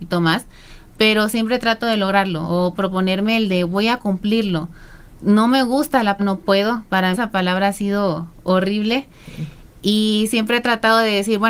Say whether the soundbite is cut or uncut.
cut